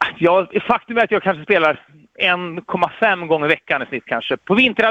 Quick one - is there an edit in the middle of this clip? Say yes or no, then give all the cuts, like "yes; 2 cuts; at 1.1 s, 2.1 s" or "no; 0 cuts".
no; 0 cuts